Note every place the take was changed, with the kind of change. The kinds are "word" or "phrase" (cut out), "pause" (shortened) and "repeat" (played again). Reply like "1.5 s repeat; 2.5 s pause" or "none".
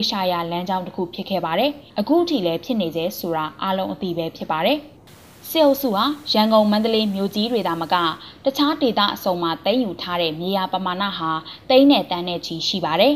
1.9 s pause; 5.0 s pause